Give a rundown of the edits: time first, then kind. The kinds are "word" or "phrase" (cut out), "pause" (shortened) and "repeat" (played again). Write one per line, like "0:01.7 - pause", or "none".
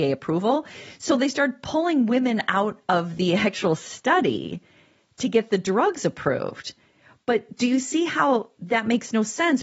none